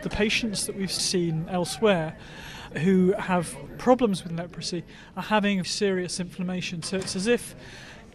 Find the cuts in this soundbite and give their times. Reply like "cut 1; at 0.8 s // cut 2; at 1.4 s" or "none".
cut 1; at 1.0 s // cut 2; at 4.3 s // cut 3; at 5.6 s

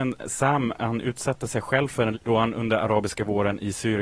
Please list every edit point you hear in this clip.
cut 1; at 2.1 s

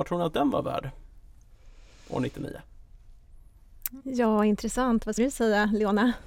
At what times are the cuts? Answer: cut 1; at 5.2 s

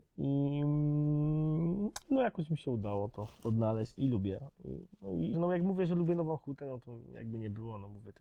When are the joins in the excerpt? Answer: cut 1; at 2.0 s // cut 2; at 4.0 s // cut 3; at 5.3 s

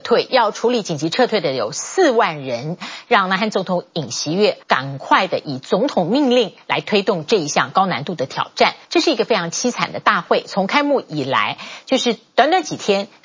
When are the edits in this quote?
cut 1; at 4.6 s // cut 2; at 8.8 s

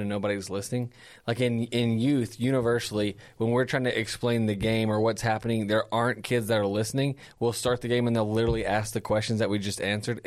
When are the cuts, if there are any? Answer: none

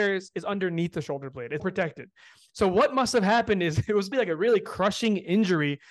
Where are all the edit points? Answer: cut 1; at 1.6 s // cut 2; at 4.1 s

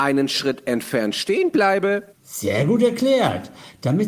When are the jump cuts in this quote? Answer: cut 1; at 2.1 s

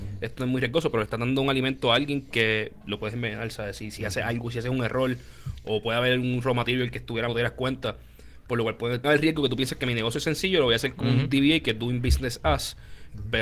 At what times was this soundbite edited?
cut 1; at 7.3 s // cut 2; at 9.0 s

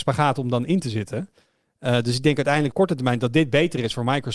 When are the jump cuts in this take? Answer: cut 1; at 2.7 s

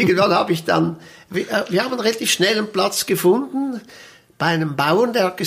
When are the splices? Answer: none

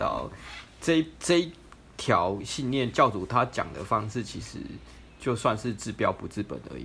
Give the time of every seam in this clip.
cut 1; at 1.2 s

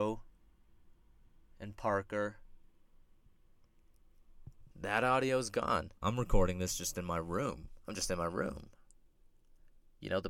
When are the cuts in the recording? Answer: cut 1; at 4.7 s // cut 2; at 6.0 s

